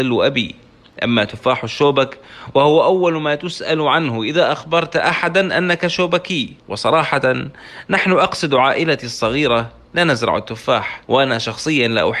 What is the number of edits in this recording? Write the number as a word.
two